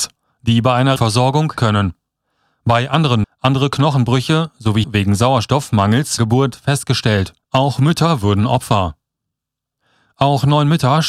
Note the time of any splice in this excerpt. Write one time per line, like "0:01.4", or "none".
0:01.0
0:01.6
0:03.2
0:04.8
0:06.2
0:07.4